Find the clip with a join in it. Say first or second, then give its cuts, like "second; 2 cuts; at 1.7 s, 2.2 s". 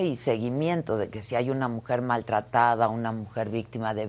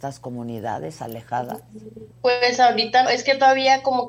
second; 2 cuts; at 2.1 s, 3.1 s